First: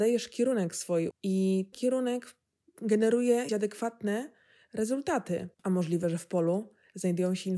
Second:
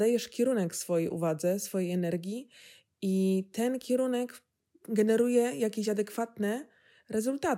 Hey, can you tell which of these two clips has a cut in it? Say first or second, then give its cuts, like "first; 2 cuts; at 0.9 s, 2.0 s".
first; 4 cuts; at 1.1 s, 1.7 s, 3.5 s, 5.5 s